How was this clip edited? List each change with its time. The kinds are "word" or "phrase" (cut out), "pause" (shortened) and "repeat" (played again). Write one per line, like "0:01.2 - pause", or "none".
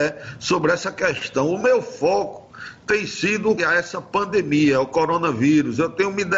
0:03.6 - word